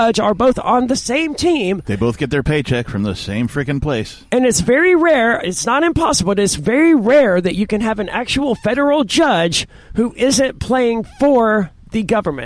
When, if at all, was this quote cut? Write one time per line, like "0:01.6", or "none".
none